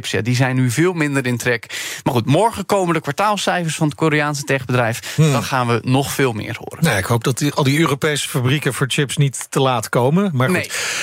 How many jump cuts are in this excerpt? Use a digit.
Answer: 0